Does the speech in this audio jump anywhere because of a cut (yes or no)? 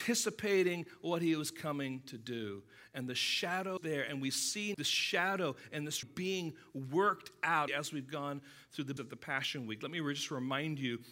yes